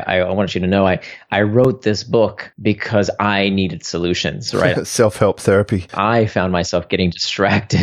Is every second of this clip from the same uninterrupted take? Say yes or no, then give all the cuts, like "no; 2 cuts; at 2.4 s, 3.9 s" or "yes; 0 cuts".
yes; 0 cuts